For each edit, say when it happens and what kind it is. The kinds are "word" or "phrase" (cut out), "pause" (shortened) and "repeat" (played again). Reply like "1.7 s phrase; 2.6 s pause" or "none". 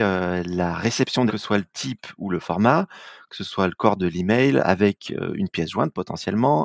1.3 s phrase